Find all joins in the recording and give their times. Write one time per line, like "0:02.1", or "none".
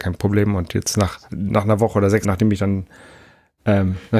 0:01.2
0:02.2

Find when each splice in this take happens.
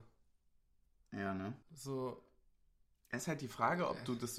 0:01.6

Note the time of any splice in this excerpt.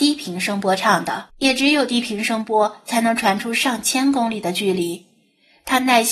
0:01.3

